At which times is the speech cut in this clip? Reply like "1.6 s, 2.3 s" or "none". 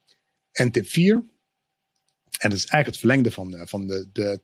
none